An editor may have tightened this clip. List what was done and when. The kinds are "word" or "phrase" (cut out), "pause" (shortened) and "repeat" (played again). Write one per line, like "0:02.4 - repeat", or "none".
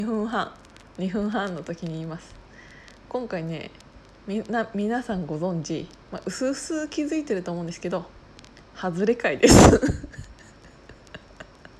0:06.0 - pause